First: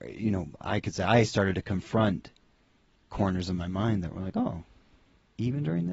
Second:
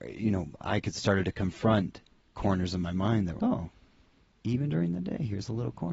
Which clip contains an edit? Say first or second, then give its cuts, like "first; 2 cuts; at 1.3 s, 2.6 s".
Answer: second; 3 cuts; at 1.0 s, 2.2 s, 3.4 s